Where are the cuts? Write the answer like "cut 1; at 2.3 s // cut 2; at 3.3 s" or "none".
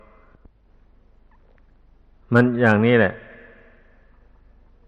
none